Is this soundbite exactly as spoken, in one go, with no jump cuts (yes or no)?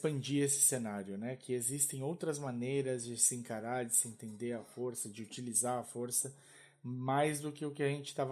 yes